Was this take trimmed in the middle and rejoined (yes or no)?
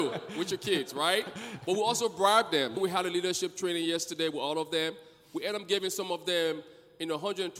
yes